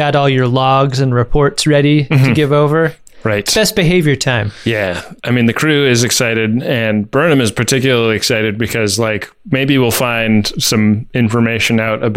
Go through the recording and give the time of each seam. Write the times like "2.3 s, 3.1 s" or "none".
5.2 s